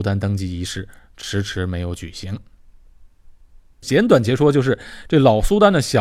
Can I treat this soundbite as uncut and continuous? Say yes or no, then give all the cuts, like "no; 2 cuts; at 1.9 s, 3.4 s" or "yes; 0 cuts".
yes; 0 cuts